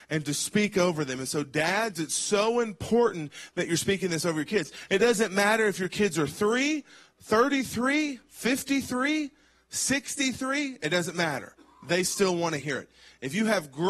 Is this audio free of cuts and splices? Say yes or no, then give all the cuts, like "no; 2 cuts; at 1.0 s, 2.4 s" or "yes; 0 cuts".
yes; 0 cuts